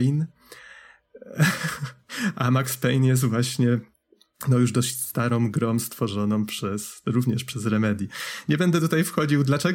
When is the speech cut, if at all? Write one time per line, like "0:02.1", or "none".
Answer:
none